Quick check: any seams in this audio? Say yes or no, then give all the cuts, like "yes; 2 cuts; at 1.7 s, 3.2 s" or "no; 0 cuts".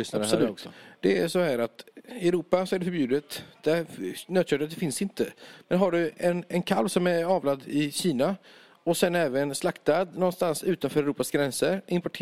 no; 0 cuts